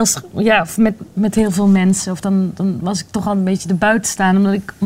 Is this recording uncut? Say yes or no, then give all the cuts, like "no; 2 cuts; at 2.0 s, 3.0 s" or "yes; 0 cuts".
yes; 0 cuts